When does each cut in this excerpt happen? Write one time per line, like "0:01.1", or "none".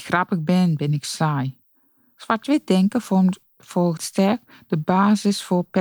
0:04.0